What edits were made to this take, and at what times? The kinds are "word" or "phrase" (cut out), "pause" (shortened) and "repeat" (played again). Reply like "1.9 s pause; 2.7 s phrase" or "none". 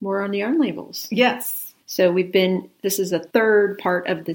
1.8 s pause; 3.3 s pause